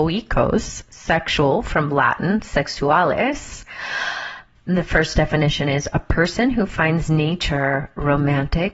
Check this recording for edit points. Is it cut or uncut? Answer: uncut